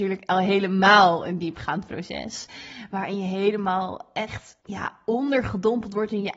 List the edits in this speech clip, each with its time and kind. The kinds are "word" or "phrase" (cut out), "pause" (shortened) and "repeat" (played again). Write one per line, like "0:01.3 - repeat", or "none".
0:04.6 - pause